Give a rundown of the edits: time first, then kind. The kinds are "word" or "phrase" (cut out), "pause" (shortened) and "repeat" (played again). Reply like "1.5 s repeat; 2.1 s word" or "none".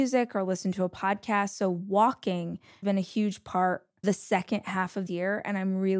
2.8 s word; 4.0 s word; 5.1 s word